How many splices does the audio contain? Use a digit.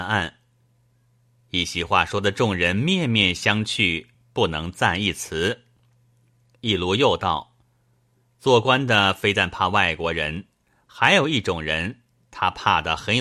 0